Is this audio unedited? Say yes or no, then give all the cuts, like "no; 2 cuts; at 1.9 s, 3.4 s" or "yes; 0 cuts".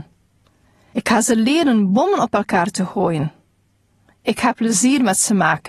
yes; 0 cuts